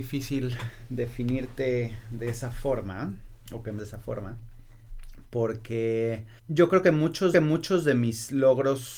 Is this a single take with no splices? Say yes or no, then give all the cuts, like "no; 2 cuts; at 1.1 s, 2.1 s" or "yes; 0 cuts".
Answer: no; 3 cuts; at 3.8 s, 6.4 s, 7.3 s